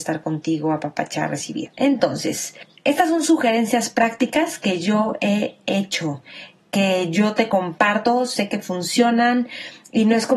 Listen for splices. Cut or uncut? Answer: uncut